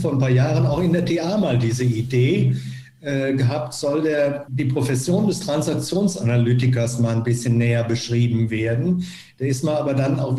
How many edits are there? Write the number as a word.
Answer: one